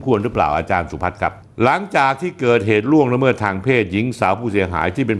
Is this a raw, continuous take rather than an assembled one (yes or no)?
yes